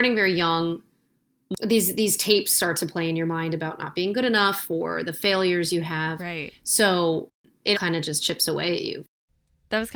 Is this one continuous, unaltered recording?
no; 1 cut; at 7.7 s

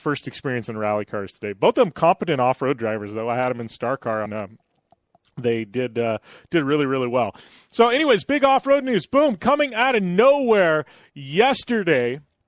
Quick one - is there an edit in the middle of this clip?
yes; 1 cut; at 4.3 s

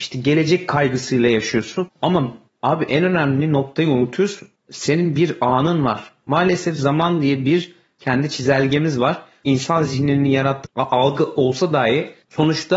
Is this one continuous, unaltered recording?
yes; 0 cuts

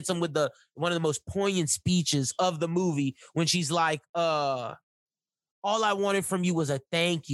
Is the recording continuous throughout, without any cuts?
yes; 0 cuts

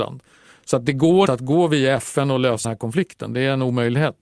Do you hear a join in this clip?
yes; 2 cuts; at 1.3 s, 2.6 s

